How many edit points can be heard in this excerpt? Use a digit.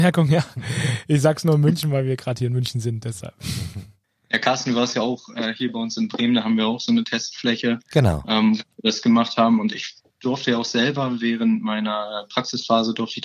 1